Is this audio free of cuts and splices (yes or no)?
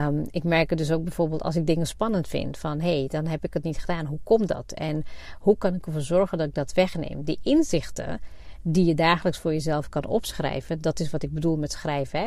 yes